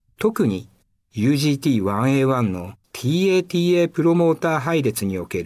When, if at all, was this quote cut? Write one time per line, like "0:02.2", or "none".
0:02.8